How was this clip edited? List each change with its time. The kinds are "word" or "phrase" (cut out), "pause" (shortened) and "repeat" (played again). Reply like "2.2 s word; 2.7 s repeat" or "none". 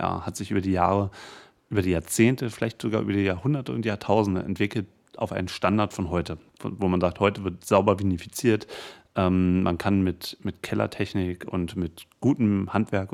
none